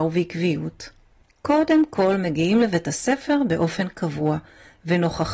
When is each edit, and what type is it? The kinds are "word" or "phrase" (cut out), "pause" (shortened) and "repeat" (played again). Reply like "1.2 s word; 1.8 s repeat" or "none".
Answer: none